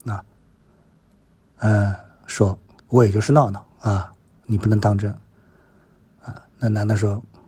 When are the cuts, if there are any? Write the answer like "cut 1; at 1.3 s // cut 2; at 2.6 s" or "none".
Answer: cut 1; at 2.8 s // cut 2; at 3.7 s

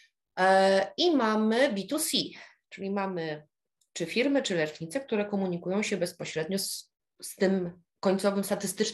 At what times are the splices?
none

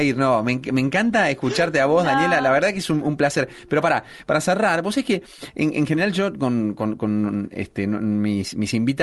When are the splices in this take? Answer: none

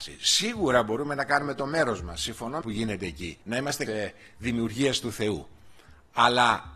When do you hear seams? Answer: cut 1; at 2.6 s // cut 2; at 3.4 s // cut 3; at 3.9 s

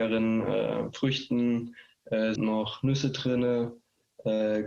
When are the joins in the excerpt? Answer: cut 1; at 2.4 s

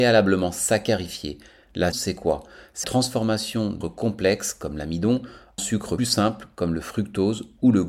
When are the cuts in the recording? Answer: cut 1; at 1.9 s // cut 2; at 2.8 s // cut 3; at 3.8 s // cut 4; at 5.6 s // cut 5; at 6.0 s

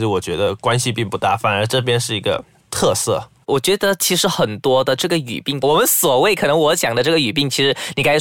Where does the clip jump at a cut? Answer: cut 1; at 5.6 s

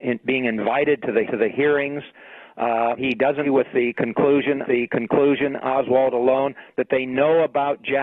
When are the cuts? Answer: cut 1; at 1.3 s // cut 2; at 3.0 s // cut 3; at 3.4 s // cut 4; at 4.6 s

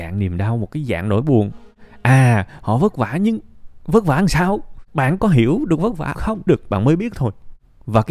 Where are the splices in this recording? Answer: cut 1; at 4.9 s // cut 2; at 6.1 s // cut 3; at 6.5 s

